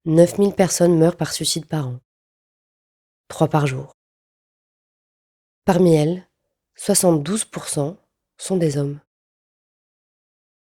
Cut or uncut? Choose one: uncut